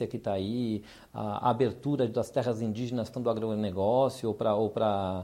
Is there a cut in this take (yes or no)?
yes